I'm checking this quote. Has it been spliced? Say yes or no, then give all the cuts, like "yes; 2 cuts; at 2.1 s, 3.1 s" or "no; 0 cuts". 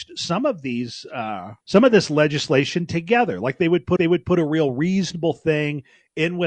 yes; 2 cuts; at 1.6 s, 4.0 s